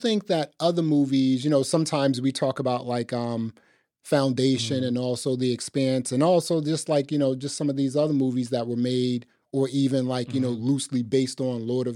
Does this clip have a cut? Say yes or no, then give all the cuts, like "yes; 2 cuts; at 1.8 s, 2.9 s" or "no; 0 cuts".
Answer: no; 0 cuts